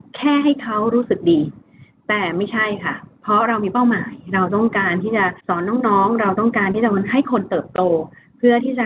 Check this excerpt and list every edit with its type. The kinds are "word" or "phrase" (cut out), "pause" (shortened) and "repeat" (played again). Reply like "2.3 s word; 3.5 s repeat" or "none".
5.4 s pause